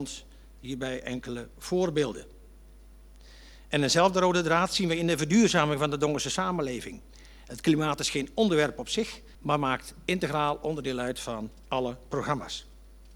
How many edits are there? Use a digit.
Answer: 1